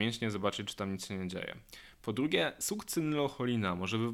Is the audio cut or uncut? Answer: uncut